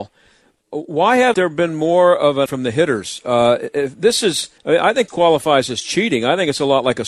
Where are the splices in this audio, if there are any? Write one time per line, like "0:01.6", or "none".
0:01.3
0:02.5
0:04.6
0:05.1